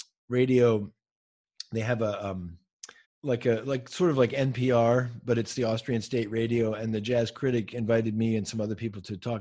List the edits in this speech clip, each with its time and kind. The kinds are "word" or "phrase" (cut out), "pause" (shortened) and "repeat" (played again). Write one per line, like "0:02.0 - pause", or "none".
0:03.0 - pause